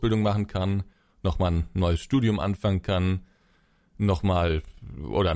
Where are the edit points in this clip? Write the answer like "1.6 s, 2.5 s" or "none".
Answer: none